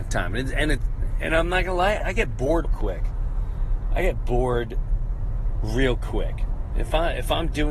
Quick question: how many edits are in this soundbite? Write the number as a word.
two